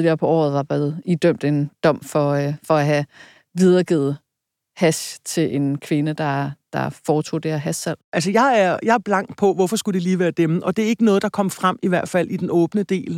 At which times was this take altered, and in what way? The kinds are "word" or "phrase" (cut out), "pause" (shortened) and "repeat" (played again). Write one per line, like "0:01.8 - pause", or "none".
0:08.0 - pause